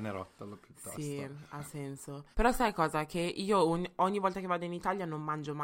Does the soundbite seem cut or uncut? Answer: cut